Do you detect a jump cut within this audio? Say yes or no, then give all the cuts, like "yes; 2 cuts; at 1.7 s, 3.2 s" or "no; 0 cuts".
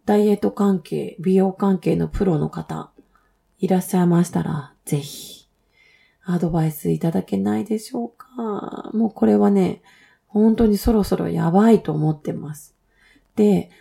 no; 0 cuts